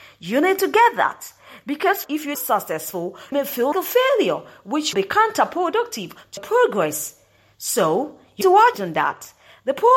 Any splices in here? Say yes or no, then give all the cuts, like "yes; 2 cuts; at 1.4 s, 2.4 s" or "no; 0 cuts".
yes; 8 cuts; at 2.0 s, 2.3 s, 3.3 s, 3.7 s, 4.9 s, 6.4 s, 8.4 s, 8.7 s